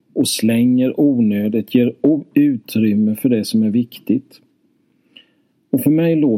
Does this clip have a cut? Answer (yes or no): no